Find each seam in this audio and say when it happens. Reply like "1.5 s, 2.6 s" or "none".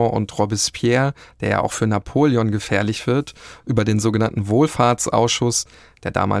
none